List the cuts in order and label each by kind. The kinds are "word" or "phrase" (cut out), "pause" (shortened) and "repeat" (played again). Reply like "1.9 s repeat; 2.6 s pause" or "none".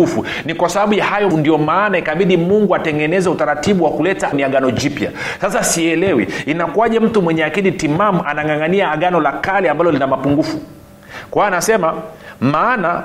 1.3 s word; 4.3 s phrase